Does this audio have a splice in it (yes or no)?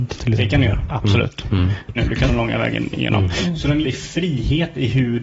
yes